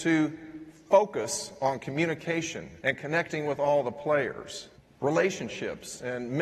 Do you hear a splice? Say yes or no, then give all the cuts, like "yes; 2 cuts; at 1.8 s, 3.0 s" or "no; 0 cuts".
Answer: yes; 2 cuts; at 2.8 s, 4.7 s